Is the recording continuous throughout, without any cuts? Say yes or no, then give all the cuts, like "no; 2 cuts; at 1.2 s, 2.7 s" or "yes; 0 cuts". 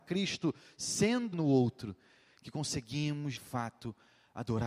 no; 2 cuts; at 1.3 s, 3.4 s